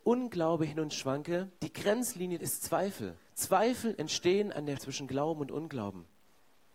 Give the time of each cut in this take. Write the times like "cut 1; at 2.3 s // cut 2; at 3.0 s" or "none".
cut 1; at 0.9 s // cut 2; at 1.6 s // cut 3; at 2.4 s // cut 4; at 3.3 s // cut 5; at 4.8 s